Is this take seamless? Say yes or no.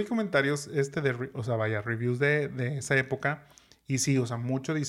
yes